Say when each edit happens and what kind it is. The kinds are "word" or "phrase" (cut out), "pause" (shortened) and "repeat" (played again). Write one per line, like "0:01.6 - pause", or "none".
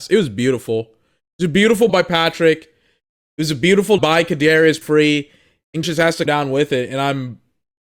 0:01.9 - word
0:04.0 - word
0:04.8 - word
0:05.8 - word
0:06.3 - word